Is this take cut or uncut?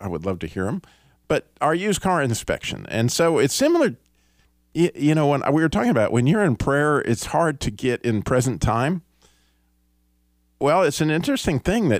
uncut